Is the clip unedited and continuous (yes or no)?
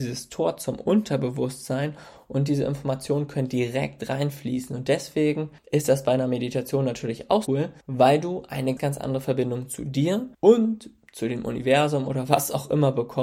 no